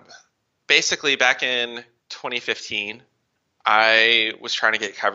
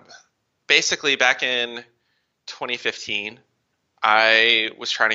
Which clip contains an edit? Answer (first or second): first